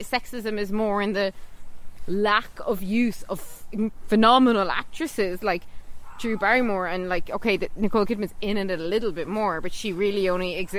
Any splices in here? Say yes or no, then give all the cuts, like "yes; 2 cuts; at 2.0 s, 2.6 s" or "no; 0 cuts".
no; 0 cuts